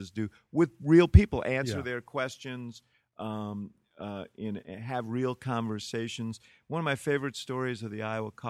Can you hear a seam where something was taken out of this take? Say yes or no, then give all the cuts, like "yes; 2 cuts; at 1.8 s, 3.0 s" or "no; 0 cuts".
no; 0 cuts